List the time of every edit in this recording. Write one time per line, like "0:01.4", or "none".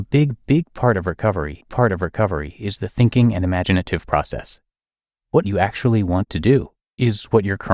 0:01.6
0:05.4
0:06.8